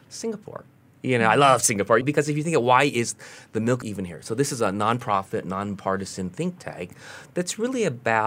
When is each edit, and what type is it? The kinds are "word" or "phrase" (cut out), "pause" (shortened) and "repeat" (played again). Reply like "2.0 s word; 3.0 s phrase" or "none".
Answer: 2.0 s word; 3.8 s word